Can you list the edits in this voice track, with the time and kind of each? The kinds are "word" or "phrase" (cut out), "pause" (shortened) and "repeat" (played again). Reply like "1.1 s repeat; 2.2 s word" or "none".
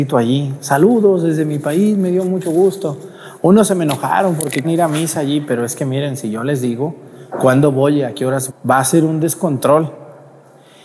4.6 s word; 7.3 s pause; 8.5 s word